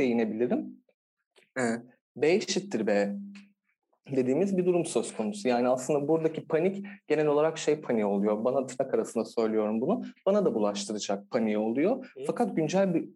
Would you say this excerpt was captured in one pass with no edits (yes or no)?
yes